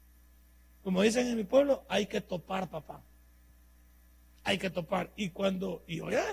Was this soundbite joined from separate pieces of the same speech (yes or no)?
no